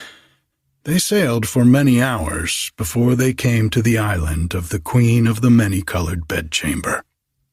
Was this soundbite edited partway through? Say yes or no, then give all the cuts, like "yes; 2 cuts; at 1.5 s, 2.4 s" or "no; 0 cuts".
no; 0 cuts